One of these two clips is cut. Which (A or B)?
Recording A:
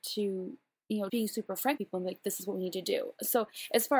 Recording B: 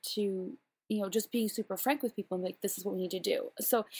A